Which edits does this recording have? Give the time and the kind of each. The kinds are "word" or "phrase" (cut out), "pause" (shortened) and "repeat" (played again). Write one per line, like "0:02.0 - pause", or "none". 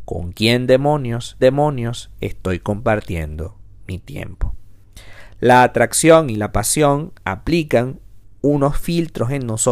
0:01.4 - repeat